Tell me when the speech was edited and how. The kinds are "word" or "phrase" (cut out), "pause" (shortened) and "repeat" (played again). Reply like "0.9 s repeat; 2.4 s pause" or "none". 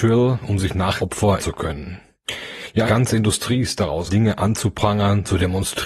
1.0 s word; 1.4 s word; 2.8 s word; 4.1 s word

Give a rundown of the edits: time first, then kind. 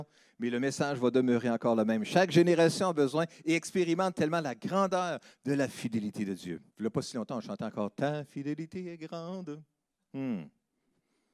6.7 s pause

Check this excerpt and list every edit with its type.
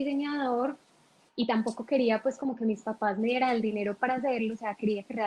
none

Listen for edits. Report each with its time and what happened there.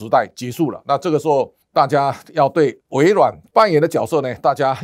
1.6 s pause; 2.8 s pause

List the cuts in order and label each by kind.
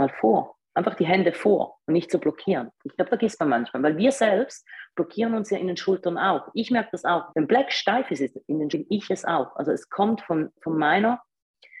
3.1 s word; 7.3 s word; 8.7 s word

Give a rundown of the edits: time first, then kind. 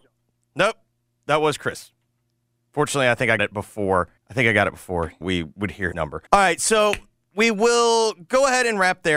3.4 s word; 4.2 s pause; 5.2 s word; 5.9 s word; 6.3 s pause

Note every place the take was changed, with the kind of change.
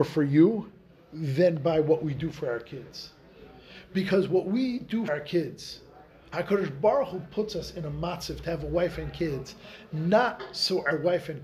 5.1 s word

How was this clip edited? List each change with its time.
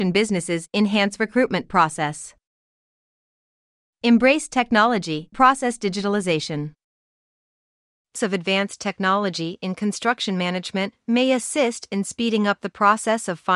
5.3 s word; 8.2 s word

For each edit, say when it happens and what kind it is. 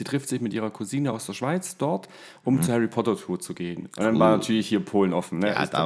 none

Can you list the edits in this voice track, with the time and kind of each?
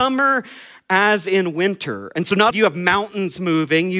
2.5 s word

